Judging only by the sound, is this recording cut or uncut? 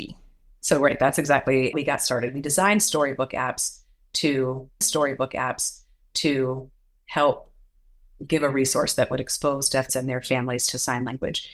cut